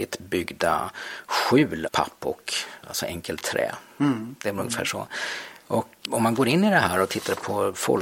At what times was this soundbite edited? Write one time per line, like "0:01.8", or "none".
0:01.9
0:06.0